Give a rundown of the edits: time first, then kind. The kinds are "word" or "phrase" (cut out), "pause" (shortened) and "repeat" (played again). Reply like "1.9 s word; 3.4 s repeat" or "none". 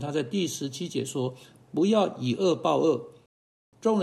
1.4 s pause